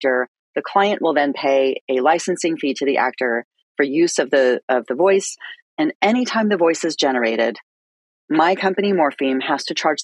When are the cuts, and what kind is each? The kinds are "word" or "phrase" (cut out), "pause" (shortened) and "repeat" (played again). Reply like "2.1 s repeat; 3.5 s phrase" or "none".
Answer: none

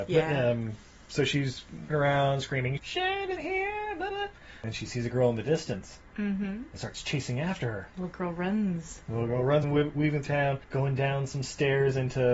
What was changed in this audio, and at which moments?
1.9 s word; 2.8 s word; 3.4 s word; 4.1 s word; 7.9 s pause; 9.6 s word; 10.3 s word; 10.6 s pause

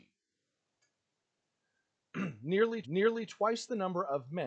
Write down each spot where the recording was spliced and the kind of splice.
2.8 s repeat

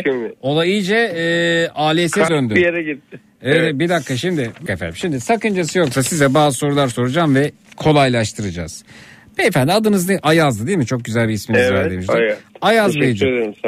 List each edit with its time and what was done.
2.3 s word; 4.7 s word; 7.7 s phrase

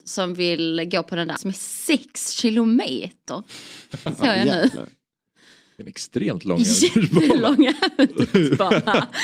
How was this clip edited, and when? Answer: 1.4 s word

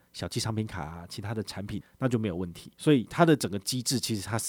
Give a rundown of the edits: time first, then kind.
2.7 s pause

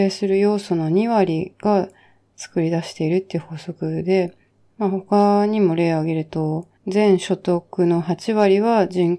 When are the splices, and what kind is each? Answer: 4.5 s pause; 6.8 s pause

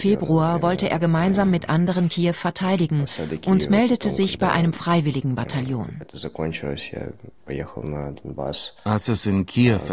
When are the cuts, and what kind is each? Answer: none

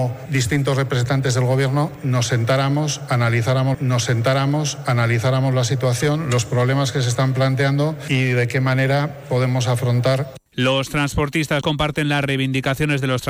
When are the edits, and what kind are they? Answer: 3.7 s repeat; 10.5 s pause; 11.6 s word

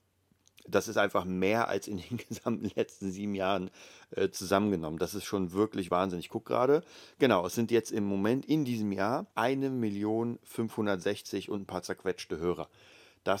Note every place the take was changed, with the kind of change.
5.9 s word; 9.3 s pause

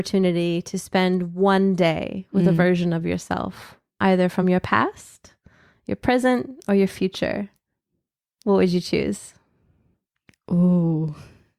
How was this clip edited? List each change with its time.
none

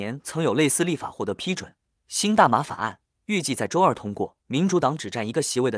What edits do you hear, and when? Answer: 4.4 s pause

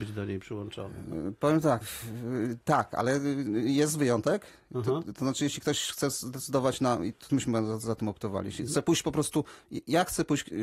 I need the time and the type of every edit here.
1.8 s word; 7.3 s word; 8.7 s word

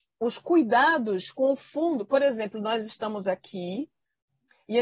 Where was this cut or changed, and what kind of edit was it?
none

